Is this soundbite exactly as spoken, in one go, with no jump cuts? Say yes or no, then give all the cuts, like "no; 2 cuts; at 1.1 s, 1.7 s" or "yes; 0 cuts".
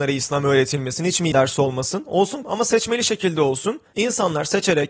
no; 2 cuts; at 1.3 s, 2.4 s